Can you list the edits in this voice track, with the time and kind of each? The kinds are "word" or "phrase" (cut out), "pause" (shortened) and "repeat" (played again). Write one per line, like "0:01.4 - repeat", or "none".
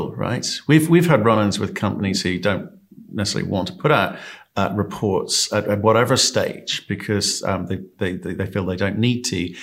none

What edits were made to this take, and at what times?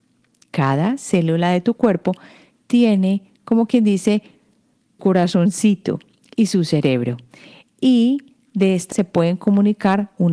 0:05.0 - word
0:08.9 - word

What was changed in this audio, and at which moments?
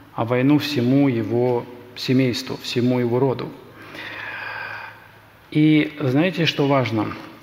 none

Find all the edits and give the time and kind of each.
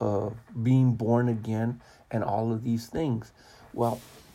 none

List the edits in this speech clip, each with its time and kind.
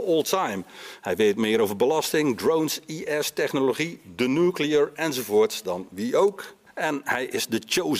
0:06.7 - pause

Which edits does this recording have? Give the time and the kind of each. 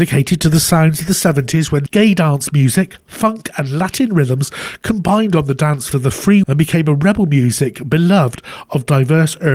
0:01.9 - word
0:05.9 - word
0:06.4 - word

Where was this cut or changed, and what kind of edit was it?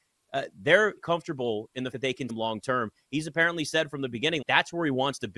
0:01.0 - word
0:01.9 - word
0:02.3 - word
0:04.4 - word

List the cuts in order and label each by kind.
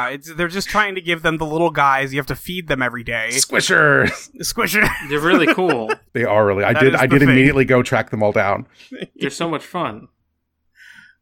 0:06.1 - pause

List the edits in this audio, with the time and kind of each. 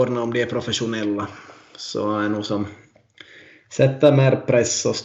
none

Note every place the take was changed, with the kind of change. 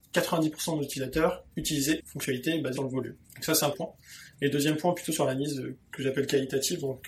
0:02.0 - phrase
0:02.8 - word
0:03.2 - pause
0:03.7 - word

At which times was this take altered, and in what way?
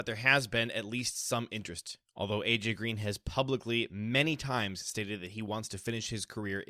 none

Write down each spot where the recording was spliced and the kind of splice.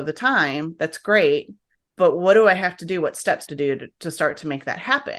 0:01.7 - pause
0:03.5 - phrase

